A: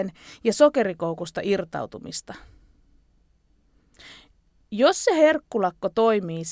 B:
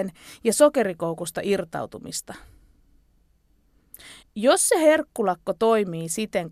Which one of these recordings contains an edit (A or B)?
B